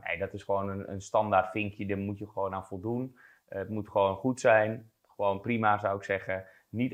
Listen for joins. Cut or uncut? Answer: uncut